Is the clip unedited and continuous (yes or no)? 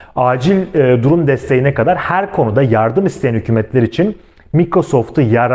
yes